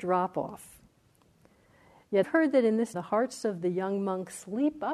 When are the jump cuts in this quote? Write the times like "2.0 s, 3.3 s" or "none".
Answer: 2.2 s, 2.9 s